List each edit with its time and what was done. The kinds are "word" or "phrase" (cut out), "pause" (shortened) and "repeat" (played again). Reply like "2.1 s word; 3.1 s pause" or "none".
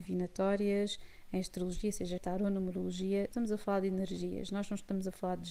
2.2 s word; 3.3 s word